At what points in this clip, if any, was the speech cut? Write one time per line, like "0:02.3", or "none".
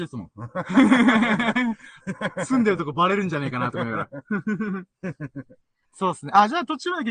0:05.9

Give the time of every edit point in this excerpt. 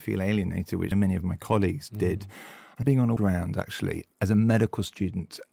0:00.9
0:02.8
0:03.2
0:04.1

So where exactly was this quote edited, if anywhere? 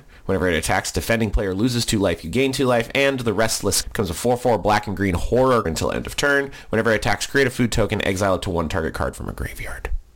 0:03.8
0:05.6

